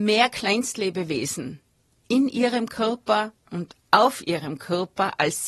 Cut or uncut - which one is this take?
uncut